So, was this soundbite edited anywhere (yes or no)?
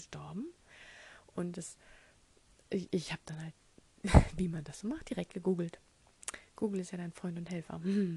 no